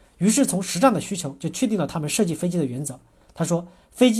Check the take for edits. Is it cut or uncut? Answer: uncut